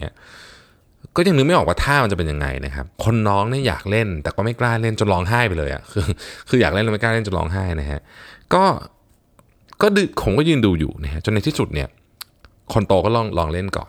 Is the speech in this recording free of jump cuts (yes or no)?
no